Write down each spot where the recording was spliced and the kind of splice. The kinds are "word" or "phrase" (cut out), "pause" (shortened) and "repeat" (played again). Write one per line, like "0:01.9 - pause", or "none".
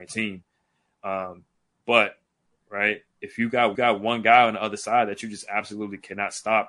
0:02.5 - phrase
0:03.7 - repeat